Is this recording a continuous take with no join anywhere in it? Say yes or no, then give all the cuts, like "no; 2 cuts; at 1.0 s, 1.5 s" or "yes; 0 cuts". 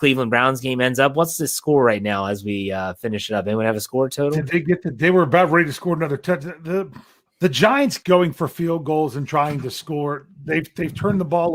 no; 2 cuts; at 7.3 s, 8.0 s